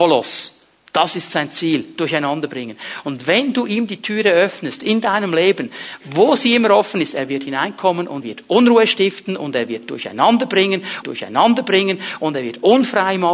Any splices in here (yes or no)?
yes